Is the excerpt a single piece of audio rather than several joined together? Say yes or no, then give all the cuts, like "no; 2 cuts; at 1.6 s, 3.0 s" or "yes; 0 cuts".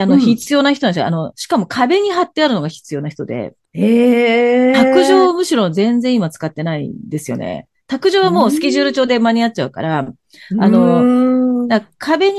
no; 1 cut; at 3.6 s